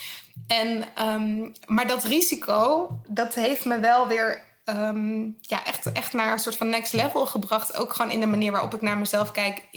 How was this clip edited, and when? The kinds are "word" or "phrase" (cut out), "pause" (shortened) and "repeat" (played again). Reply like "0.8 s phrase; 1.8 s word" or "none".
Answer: none

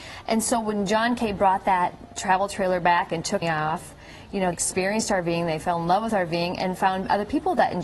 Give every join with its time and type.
3.4 s phrase; 4.5 s word

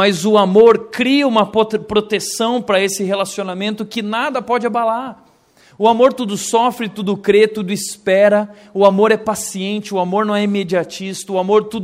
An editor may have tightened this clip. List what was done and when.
none

